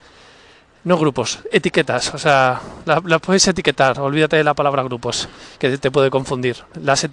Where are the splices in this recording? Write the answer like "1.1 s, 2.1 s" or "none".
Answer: 5.5 s

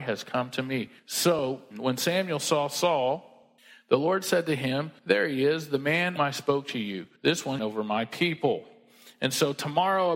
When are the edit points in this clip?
1.0 s, 3.6 s, 5.0 s, 6.2 s, 7.2 s, 7.6 s

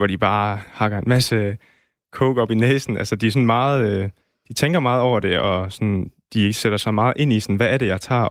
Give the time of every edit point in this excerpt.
none

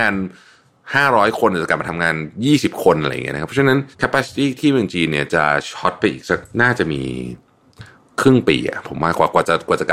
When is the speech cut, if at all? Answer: 3.9 s, 6.5 s, 8.0 s

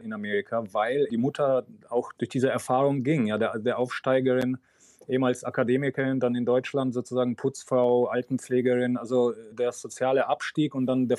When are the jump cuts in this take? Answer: 1.1 s, 9.5 s

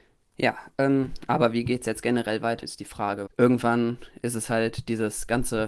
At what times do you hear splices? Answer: 2.6 s, 3.3 s

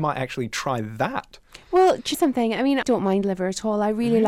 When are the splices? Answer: 2.1 s, 2.8 s

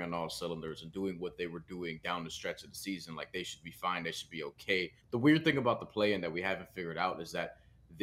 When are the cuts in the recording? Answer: 5.0 s

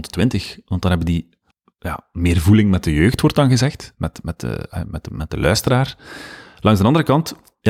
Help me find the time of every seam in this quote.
1.5 s

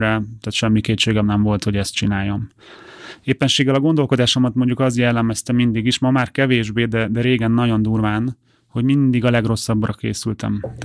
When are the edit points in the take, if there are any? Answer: none

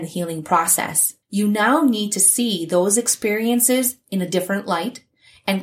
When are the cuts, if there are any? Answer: 1.2 s

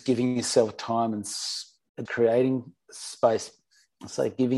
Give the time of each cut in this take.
2.1 s

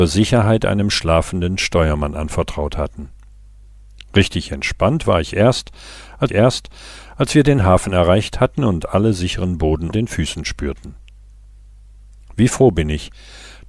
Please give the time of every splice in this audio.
6.3 s, 9.9 s

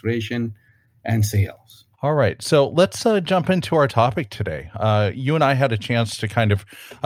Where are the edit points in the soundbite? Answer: 1.9 s

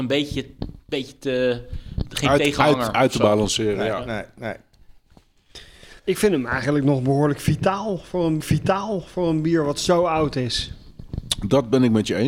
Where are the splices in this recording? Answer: 6.0 s, 8.4 s

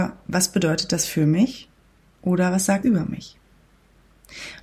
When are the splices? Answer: 2.8 s

